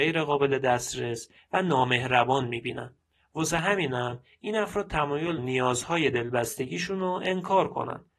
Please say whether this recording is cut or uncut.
cut